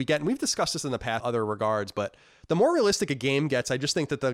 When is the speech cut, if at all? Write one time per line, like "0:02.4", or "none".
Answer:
0:01.2